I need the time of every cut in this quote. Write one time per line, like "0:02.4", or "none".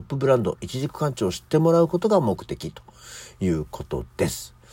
none